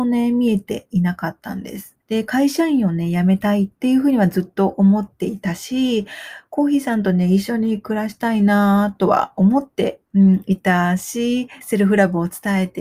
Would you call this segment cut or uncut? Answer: cut